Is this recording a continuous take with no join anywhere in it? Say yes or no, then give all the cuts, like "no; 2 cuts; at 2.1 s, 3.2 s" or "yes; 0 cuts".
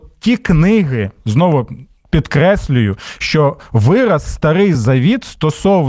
yes; 0 cuts